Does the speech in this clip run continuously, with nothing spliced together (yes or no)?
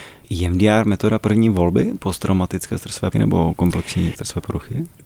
no